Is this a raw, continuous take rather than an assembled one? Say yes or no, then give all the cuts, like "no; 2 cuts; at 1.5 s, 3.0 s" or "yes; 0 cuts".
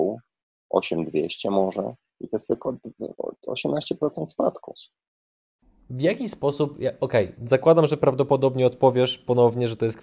no; 1 cut; at 7.3 s